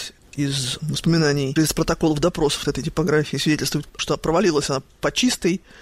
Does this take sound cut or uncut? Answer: cut